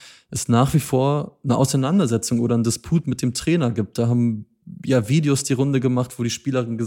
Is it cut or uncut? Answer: uncut